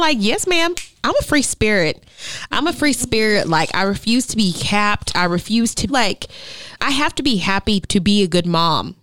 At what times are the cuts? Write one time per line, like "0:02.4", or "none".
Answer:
0:01.0
0:05.9
0:06.8
0:07.8

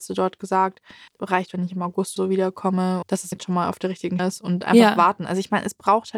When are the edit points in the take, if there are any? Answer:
0:01.1
0:02.2
0:03.0
0:03.3
0:04.2

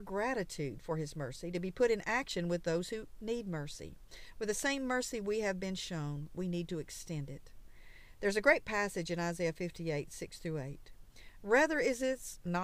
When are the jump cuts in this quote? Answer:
none

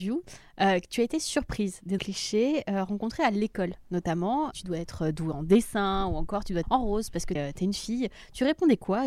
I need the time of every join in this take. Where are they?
0:02.0
0:04.5
0:06.6
0:07.4

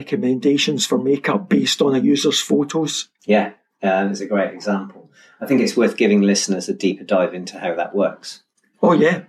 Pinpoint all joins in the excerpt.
none

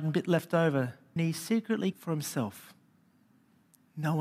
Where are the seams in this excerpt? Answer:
0:01.2
0:01.9

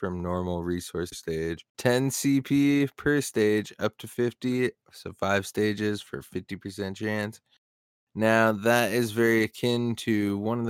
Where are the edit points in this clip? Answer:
0:01.1
0:01.7

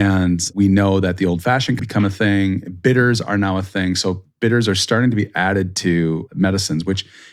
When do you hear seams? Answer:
0:01.8

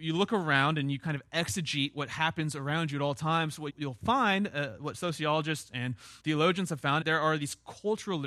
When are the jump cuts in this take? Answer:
0:03.7
0:06.2
0:07.0

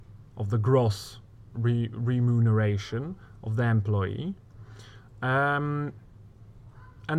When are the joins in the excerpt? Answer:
0:01.5

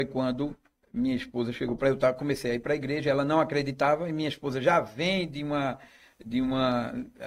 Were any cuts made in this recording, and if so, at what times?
none

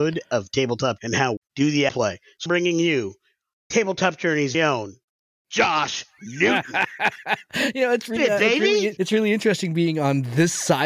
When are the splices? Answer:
0:01.0
0:01.4
0:01.9
0:02.5
0:04.5
0:08.2
0:09.0

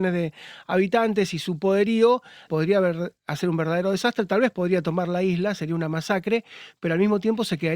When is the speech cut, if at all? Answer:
0:02.5

